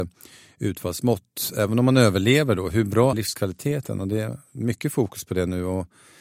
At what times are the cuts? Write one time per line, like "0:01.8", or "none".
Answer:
0:03.1